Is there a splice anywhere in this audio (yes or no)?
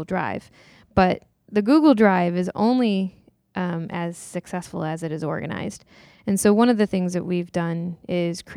no